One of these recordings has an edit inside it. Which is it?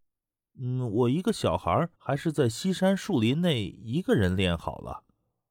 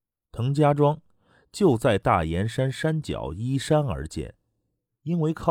first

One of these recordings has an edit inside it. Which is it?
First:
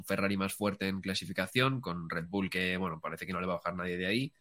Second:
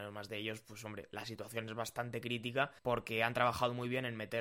second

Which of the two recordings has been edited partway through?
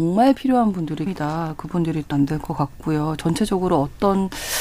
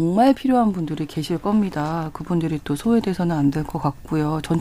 first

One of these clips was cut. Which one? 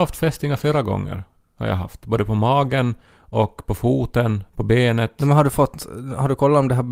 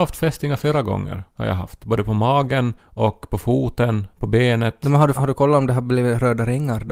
second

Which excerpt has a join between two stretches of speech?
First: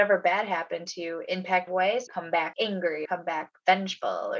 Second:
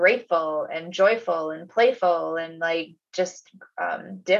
first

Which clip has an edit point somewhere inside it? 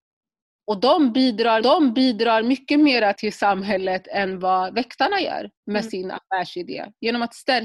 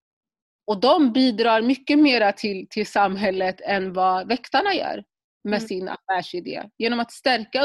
first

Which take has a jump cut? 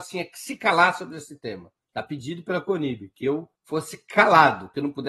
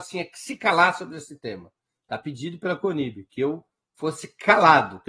first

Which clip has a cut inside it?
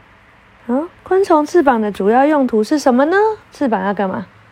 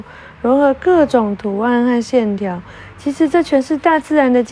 first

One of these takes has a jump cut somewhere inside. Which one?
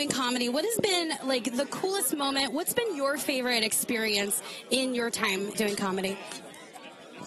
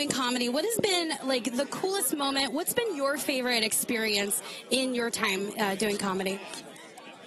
first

